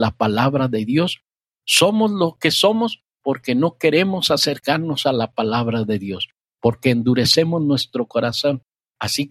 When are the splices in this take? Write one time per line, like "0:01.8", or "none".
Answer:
none